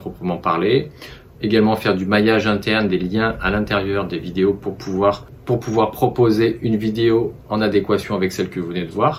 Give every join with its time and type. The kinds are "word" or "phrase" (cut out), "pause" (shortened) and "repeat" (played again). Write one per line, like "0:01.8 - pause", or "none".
none